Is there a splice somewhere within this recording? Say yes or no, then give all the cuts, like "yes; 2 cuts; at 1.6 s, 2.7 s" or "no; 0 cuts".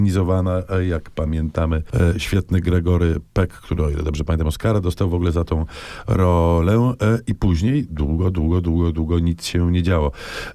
no; 0 cuts